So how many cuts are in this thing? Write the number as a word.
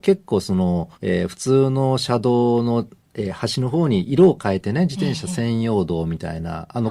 one